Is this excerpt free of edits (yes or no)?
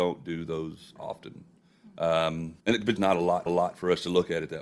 no